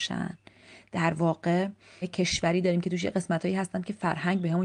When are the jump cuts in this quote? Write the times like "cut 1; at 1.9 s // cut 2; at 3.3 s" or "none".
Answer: cut 1; at 2.0 s